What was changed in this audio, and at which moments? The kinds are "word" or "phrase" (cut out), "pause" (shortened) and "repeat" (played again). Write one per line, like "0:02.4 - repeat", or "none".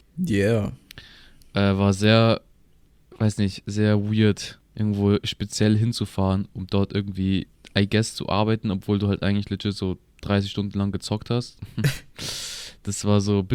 none